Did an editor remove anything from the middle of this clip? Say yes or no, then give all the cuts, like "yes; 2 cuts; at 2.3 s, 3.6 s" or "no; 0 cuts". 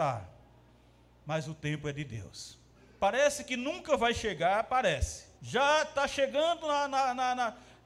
yes; 2 cuts; at 2.7 s, 5.4 s